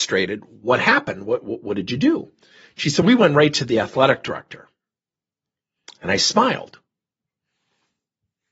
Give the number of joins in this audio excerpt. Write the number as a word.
one